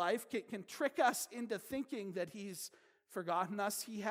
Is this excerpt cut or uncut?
uncut